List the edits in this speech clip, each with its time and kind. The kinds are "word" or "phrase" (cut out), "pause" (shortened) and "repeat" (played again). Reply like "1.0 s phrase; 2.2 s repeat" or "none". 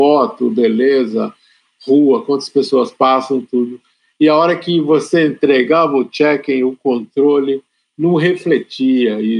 none